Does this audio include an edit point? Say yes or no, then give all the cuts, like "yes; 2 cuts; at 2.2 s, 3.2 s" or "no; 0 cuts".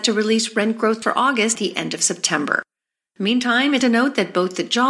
yes; 3 cuts; at 1.0 s, 1.5 s, 3.8 s